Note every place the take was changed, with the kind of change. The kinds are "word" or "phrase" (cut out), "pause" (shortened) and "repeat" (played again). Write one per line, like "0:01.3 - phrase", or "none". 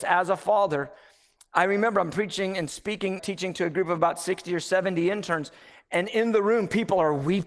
0:03.2 - word